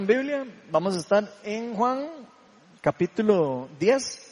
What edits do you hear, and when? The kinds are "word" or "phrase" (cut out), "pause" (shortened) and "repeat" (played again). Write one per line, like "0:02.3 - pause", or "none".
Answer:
none